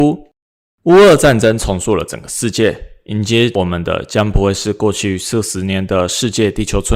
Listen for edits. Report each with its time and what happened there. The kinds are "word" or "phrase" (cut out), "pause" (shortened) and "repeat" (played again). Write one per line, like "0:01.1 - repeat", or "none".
none